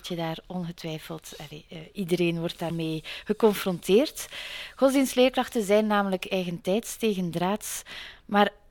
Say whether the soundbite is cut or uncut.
cut